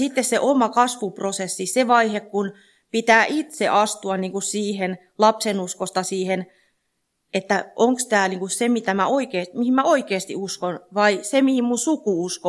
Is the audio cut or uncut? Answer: uncut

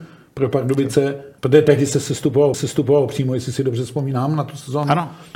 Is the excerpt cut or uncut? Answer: cut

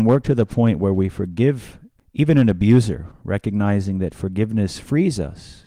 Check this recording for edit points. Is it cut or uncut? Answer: uncut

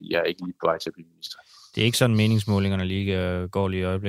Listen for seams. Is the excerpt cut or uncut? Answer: uncut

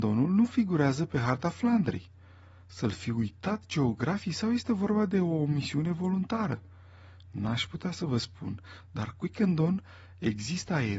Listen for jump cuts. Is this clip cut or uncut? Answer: uncut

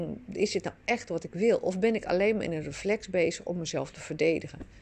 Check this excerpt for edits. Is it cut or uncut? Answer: uncut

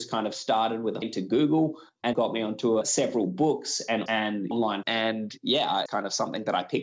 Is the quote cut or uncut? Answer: cut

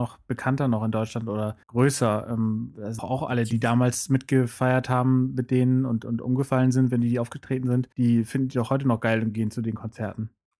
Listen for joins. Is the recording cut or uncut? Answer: cut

